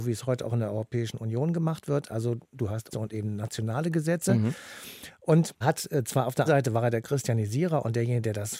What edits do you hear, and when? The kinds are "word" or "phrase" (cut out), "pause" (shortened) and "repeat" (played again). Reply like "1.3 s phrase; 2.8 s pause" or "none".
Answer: 2.9 s word; 5.6 s word; 6.5 s word